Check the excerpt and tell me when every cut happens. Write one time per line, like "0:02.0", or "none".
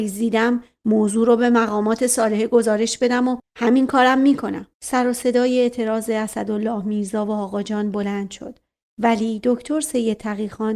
0:04.7